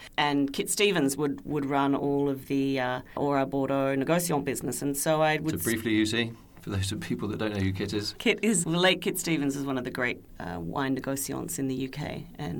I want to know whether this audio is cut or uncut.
cut